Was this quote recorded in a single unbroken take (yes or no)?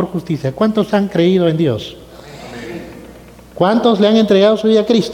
yes